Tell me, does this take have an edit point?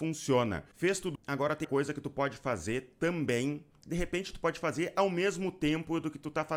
yes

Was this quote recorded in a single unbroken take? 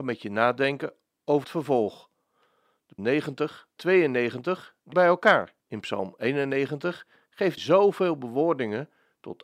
no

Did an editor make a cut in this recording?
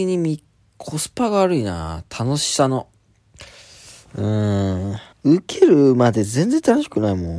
yes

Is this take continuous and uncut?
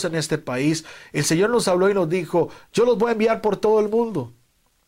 yes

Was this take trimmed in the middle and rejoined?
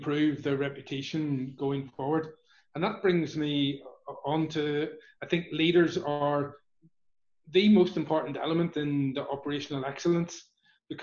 no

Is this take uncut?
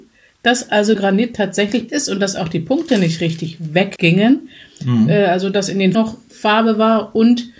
no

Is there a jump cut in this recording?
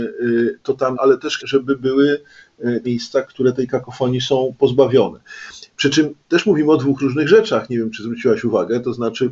yes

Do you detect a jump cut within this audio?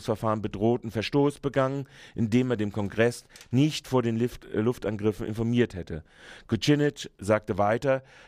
no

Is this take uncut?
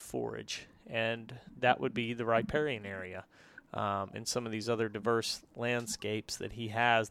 yes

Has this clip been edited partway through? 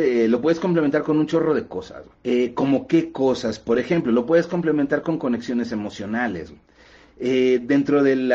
yes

